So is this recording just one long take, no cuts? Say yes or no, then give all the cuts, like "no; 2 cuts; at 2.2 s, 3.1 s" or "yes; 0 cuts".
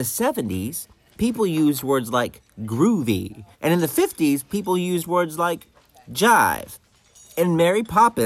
no; 1 cut; at 3.5 s